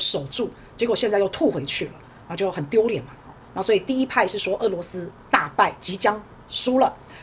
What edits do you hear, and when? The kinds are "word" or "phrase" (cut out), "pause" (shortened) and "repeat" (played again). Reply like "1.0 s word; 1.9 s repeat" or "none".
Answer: none